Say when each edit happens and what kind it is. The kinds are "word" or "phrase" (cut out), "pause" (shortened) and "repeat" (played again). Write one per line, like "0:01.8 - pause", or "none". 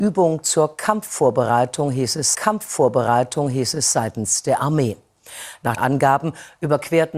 0:02.3 - repeat
0:05.8 - word